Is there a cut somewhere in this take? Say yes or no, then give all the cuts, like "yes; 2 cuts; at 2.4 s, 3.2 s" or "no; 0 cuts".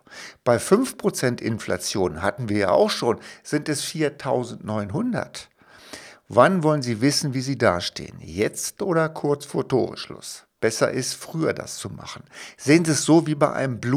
no; 0 cuts